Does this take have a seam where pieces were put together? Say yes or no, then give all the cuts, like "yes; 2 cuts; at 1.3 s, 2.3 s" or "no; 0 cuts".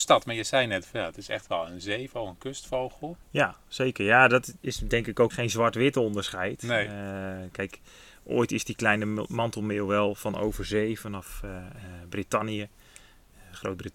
yes; 3 cuts; at 3.2 s, 4.6 s, 5.3 s